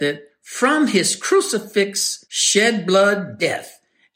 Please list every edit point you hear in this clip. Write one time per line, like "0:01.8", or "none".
0:02.2